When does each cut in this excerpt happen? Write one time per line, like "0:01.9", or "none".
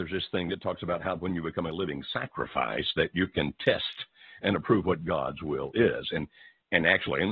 none